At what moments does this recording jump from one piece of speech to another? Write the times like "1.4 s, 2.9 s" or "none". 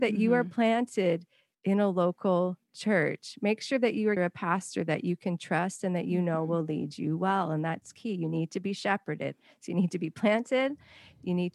2.6 s, 4.2 s